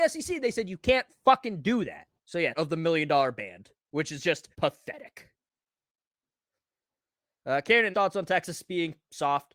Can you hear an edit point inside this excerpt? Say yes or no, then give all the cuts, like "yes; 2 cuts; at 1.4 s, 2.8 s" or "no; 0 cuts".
yes; 5 cuts; at 2.2 s, 2.5 s, 3.8 s, 4.5 s, 7.9 s